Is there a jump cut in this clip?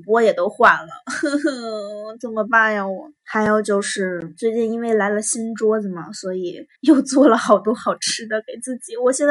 yes; 3 cuts; at 3.2 s, 4.4 s, 6.8 s

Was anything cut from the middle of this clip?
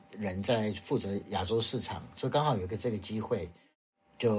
no; 0 cuts

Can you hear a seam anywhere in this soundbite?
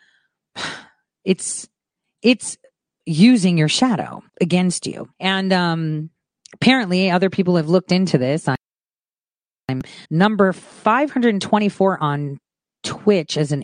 yes; 4 cuts; at 1.8 s, 4.3 s, 5.1 s, 10.0 s

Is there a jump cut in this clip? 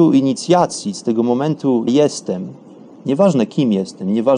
yes; 1 cut; at 1.9 s

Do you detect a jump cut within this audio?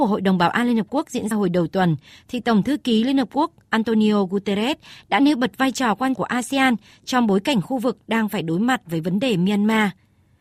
yes; 2 cuts; at 1.3 s, 6.1 s

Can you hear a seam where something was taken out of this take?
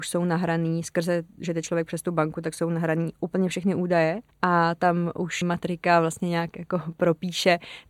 yes; 2 cuts; at 4.3 s, 5.4 s

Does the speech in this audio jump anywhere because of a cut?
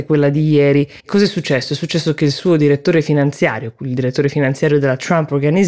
yes; 1 cut; at 1.0 s

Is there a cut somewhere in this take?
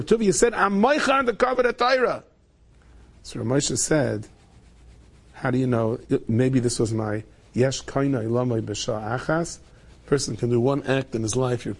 no; 0 cuts

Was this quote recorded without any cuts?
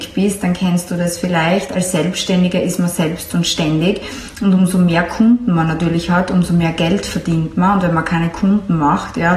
yes; 0 cuts

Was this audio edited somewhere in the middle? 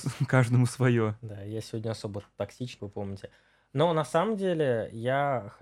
yes; 1 cut; at 2.8 s

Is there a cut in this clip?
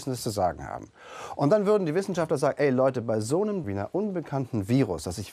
yes; 1 cut; at 3.6 s

